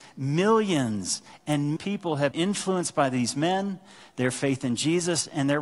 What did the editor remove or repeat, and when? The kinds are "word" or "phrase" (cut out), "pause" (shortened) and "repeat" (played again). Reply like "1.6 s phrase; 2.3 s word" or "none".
1.8 s phrase; 2.3 s word